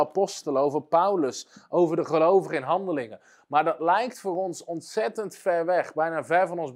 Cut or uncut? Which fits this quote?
uncut